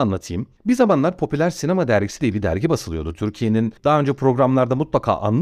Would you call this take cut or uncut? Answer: uncut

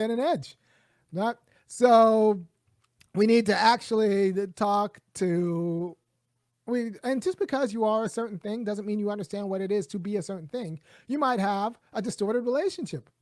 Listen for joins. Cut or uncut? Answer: uncut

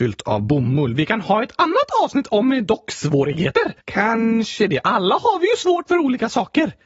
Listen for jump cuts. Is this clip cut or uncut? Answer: cut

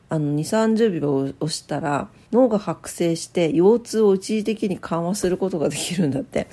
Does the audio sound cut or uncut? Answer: cut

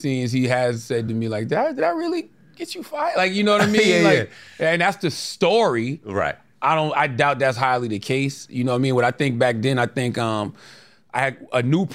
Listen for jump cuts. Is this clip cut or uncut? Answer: uncut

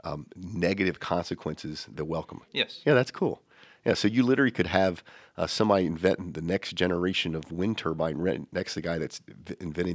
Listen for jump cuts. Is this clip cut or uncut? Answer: cut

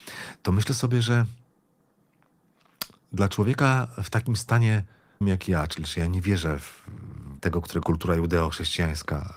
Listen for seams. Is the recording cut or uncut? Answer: cut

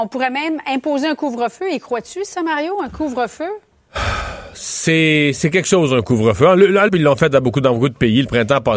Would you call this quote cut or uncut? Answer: cut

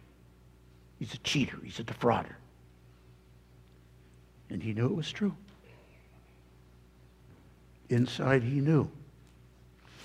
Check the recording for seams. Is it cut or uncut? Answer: uncut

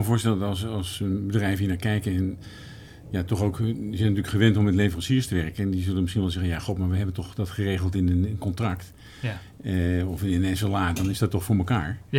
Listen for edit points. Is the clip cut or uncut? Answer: uncut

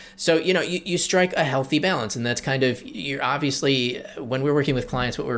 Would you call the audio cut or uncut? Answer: uncut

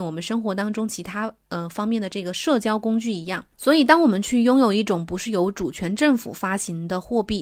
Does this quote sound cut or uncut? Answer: cut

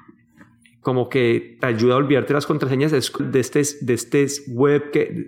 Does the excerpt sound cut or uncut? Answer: cut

